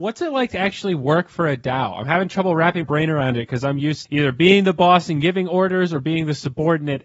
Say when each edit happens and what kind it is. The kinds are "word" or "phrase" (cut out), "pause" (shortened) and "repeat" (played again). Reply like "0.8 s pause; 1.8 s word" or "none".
2.8 s word; 4.0 s word